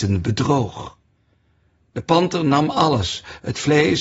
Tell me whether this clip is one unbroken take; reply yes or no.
yes